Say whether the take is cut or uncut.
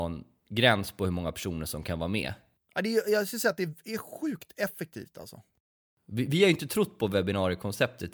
uncut